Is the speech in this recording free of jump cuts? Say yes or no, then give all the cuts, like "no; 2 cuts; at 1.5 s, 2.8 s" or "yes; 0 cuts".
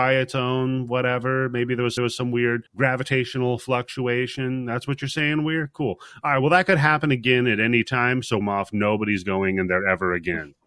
no; 3 cuts; at 2.0 s, 2.7 s, 8.4 s